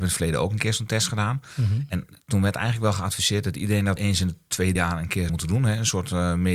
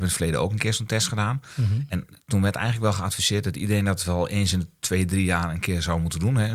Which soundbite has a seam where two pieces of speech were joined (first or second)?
first